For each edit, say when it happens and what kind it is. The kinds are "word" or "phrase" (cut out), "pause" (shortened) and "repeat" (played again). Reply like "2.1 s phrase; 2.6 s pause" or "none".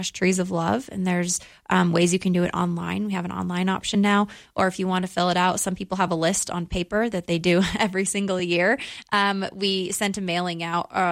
none

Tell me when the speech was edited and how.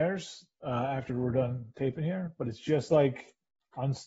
none

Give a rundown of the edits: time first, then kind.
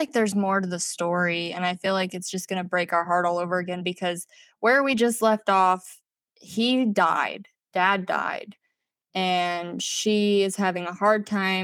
none

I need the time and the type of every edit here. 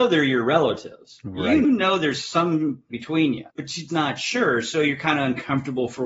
1.6 s phrase; 2.9 s word; 3.5 s pause; 3.9 s word

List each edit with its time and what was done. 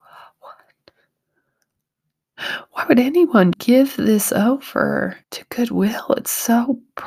3.5 s word; 5.2 s pause

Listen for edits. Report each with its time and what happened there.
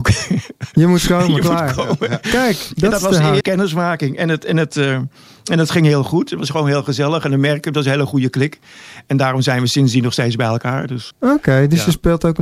3.4 s word; 11.1 s word

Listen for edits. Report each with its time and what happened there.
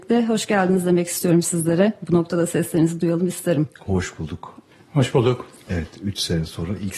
none

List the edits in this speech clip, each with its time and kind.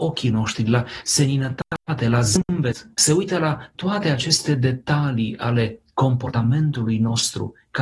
2.9 s pause

